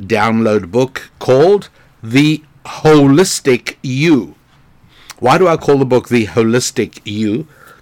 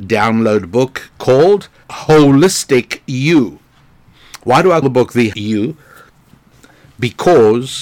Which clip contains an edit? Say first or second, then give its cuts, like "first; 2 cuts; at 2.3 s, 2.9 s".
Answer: second; 3 cuts; at 1.8 s, 4.8 s, 5.3 s